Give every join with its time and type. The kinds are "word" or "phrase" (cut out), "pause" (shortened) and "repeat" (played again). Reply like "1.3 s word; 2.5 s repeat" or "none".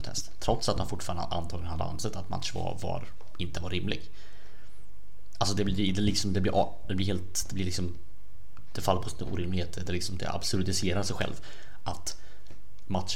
none